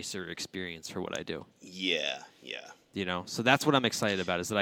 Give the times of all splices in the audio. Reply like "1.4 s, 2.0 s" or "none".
1.5 s

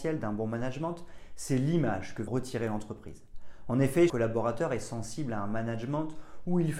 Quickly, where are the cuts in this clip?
2.3 s, 4.1 s

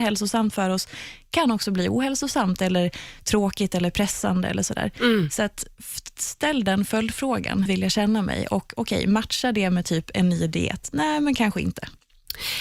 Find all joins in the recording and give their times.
7.7 s

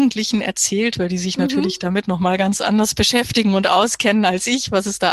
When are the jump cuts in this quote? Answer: none

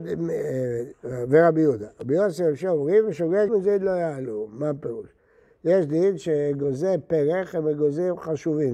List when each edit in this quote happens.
3.5 s

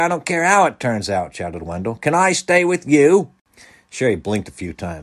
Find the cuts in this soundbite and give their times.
none

